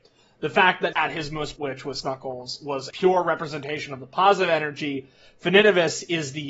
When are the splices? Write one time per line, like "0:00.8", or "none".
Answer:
0:00.9
0:01.6
0:02.0
0:02.9

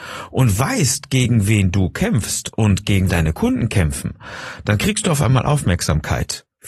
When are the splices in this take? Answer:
0:03.1

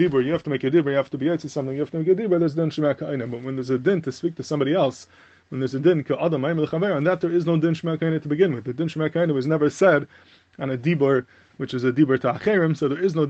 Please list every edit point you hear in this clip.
none

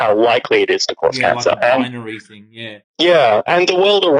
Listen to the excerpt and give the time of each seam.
0:02.8

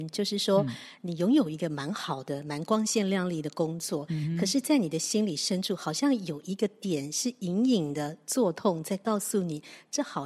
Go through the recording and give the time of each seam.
none

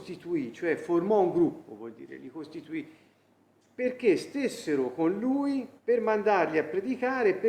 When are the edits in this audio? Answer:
0:05.8

